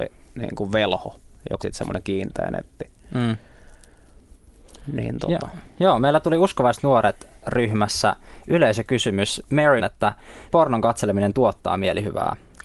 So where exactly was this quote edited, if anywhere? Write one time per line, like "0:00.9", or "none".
0:01.6
0:09.8
0:10.5